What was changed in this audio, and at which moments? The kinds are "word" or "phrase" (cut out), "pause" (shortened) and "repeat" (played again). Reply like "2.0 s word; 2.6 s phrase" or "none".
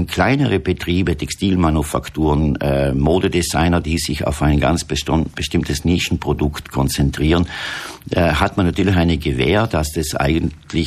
none